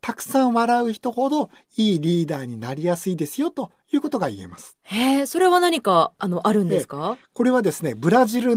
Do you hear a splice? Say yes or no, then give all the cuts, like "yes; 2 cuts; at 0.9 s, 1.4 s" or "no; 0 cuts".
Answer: no; 0 cuts